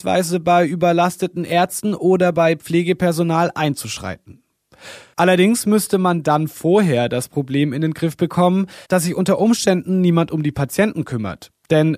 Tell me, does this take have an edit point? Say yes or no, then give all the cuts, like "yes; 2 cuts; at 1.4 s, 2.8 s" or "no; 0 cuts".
yes; 1 cut; at 8.8 s